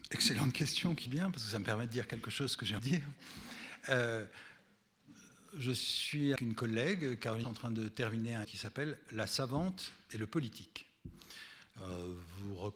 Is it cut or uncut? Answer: cut